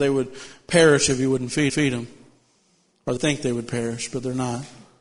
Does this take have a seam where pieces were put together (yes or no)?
yes